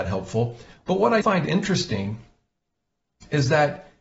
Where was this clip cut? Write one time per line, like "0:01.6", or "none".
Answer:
0:01.2

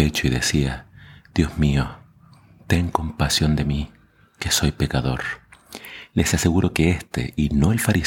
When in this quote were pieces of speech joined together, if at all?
none

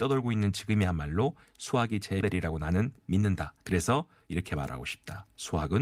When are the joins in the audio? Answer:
0:02.2
0:03.6

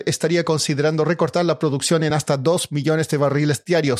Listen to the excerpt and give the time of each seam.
none

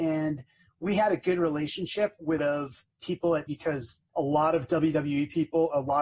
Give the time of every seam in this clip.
0:02.4
0:02.9
0:03.5
0:04.1

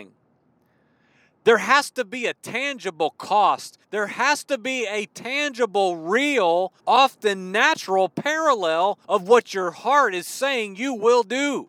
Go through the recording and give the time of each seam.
0:03.8
0:06.8
0:09.0

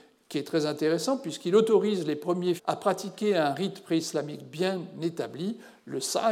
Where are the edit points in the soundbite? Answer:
0:02.6

